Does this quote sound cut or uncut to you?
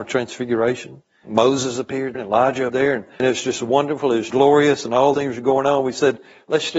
cut